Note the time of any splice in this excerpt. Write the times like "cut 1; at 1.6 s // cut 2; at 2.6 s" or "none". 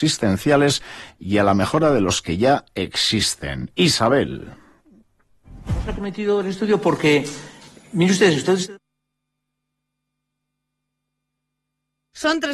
none